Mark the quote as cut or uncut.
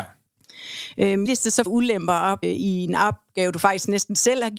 cut